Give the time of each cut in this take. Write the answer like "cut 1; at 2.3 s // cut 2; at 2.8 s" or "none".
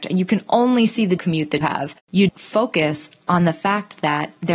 cut 1; at 1.2 s // cut 2; at 1.6 s // cut 3; at 2.3 s

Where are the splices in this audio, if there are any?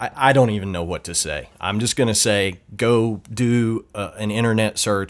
none

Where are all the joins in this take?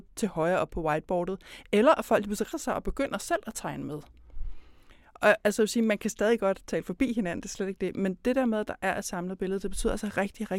cut 1; at 2.5 s

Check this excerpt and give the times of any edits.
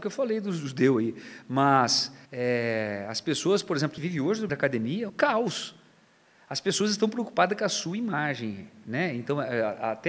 cut 1; at 2.3 s // cut 2; at 4.0 s // cut 3; at 4.5 s // cut 4; at 5.1 s

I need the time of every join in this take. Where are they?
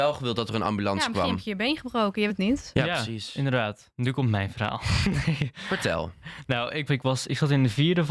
cut 1; at 2.3 s // cut 2; at 6.9 s

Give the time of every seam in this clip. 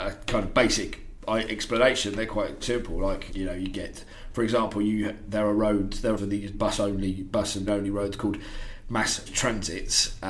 cut 1; at 2.6 s // cut 2; at 3.3 s // cut 3; at 6.2 s // cut 4; at 6.5 s // cut 5; at 7.7 s // cut 6; at 9.3 s

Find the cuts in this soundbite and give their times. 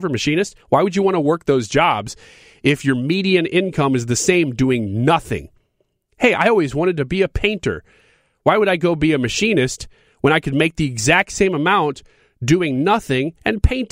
none

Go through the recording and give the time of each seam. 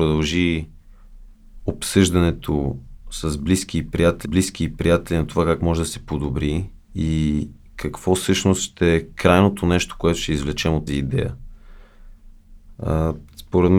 cut 1; at 4.3 s // cut 2; at 6.8 s // cut 3; at 10.9 s

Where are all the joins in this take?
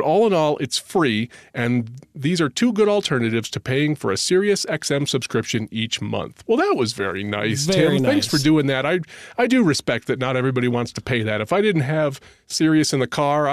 none

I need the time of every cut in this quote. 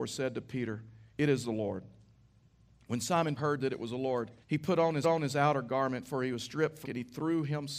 cut 1; at 1.1 s // cut 2; at 3.4 s // cut 3; at 4.4 s // cut 4; at 5.0 s // cut 5; at 6.8 s

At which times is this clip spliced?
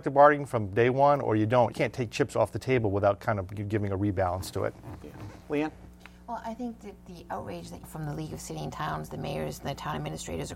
cut 1; at 1.7 s // cut 2; at 5.4 s // cut 3; at 7.8 s

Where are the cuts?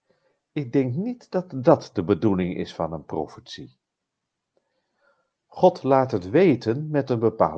none

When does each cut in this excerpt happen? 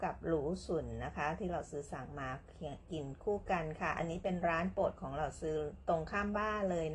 none

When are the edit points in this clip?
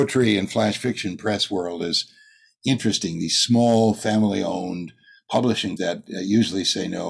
cut 1; at 5.8 s

